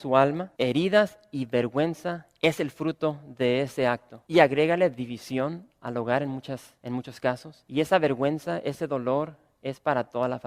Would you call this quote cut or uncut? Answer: uncut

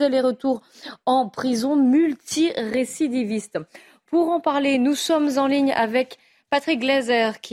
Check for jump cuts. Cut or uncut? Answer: uncut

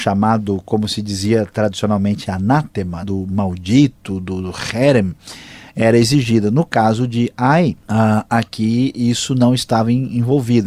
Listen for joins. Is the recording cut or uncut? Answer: cut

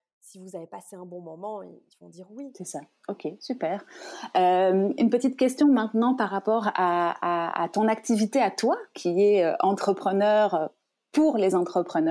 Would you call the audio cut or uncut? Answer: uncut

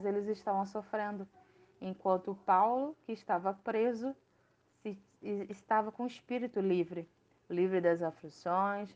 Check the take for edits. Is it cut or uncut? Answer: uncut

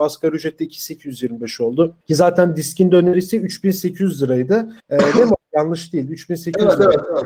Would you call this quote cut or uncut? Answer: cut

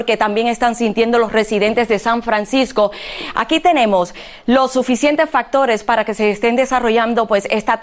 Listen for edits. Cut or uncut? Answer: uncut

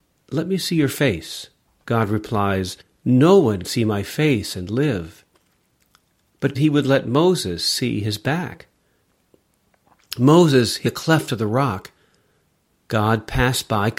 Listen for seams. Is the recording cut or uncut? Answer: cut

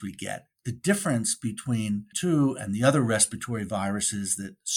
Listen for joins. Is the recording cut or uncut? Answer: cut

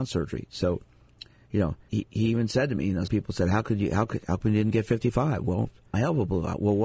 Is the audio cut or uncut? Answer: cut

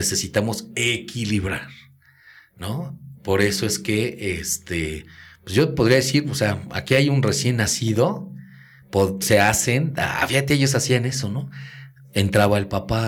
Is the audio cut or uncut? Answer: cut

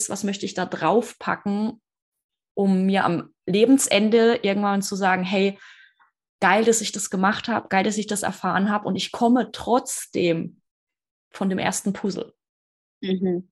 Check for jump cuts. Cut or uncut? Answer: uncut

